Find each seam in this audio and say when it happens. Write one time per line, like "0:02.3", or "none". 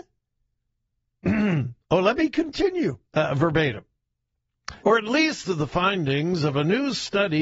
0:01.8
0:03.0
0:04.8
0:05.4